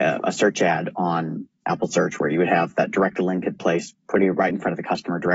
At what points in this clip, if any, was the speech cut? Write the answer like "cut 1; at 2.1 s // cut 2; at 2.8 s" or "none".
none